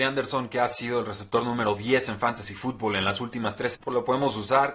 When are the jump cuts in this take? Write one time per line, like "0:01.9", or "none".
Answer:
0:03.7